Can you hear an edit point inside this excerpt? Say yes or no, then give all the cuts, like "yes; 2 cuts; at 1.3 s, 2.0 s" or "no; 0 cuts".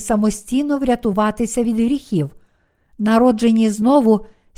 no; 0 cuts